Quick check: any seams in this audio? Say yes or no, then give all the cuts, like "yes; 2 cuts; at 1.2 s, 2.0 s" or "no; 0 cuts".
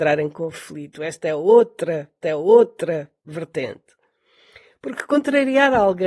yes; 1 cut; at 2.2 s